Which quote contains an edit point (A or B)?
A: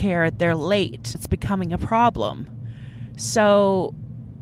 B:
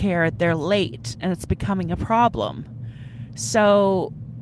A